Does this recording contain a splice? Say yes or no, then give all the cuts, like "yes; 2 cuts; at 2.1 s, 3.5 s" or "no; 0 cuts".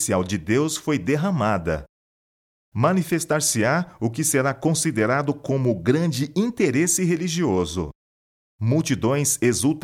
no; 0 cuts